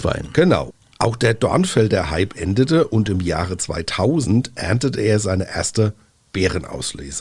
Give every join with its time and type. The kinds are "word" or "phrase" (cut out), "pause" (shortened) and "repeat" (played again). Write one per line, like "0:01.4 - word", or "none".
none